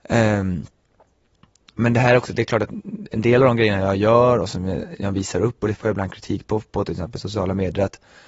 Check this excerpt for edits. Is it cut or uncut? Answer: uncut